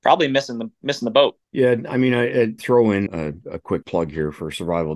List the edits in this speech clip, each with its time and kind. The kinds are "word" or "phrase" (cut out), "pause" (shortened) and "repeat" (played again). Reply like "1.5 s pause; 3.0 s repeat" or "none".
1.4 s pause; 2.6 s word; 3.1 s word; 3.8 s word